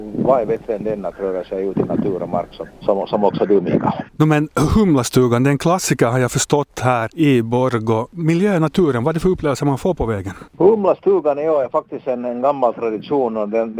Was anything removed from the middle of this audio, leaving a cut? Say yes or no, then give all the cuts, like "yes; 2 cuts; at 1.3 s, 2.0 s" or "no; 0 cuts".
yes; 2 cuts; at 4.1 s, 10.5 s